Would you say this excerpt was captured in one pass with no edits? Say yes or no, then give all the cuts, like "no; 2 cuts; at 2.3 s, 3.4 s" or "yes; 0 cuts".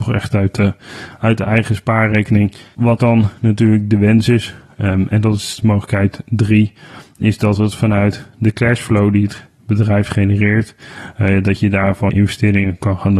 no; 2 cuts; at 3.0 s, 12.1 s